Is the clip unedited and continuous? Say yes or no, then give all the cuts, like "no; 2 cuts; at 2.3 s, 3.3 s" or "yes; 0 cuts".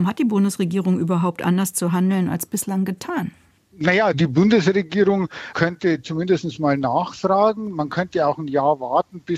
no; 1 cut; at 4.1 s